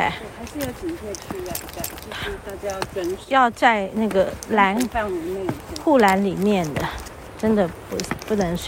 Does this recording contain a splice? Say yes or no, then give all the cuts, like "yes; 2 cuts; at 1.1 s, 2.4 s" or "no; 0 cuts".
yes; 1 cut; at 1.8 s